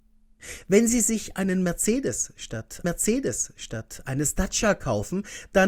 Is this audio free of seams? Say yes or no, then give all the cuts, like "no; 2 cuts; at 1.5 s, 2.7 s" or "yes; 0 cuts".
no; 1 cut; at 2.8 s